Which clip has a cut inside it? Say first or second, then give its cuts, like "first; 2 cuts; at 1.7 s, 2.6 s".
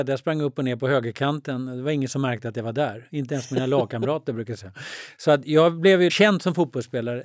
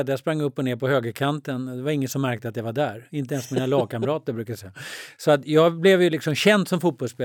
first; 1 cut; at 6.1 s